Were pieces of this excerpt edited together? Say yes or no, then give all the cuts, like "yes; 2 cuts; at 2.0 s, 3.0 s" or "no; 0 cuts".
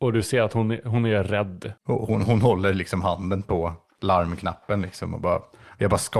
yes; 1 cut; at 1.8 s